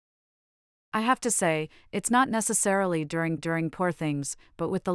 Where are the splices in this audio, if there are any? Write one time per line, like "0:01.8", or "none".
0:03.4